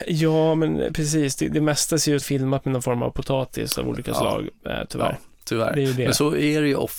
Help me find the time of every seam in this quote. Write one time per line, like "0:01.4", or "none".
0:02.2